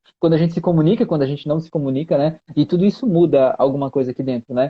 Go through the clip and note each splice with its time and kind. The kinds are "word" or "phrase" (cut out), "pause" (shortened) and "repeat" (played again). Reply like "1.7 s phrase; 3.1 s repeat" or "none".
none